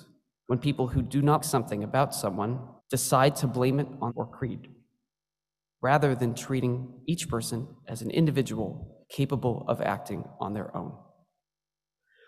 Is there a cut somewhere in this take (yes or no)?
yes